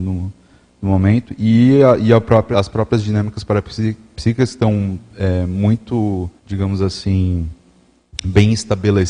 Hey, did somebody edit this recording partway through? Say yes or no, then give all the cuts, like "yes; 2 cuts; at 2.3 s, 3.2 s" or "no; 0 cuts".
yes; 2 cuts; at 2.5 s, 6.4 s